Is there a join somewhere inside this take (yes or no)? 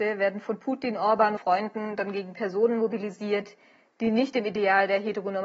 yes